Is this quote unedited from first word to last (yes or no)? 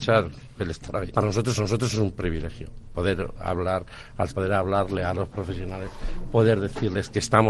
no